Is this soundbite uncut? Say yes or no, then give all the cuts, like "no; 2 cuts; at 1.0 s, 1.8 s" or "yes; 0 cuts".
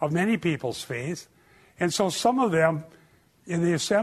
yes; 0 cuts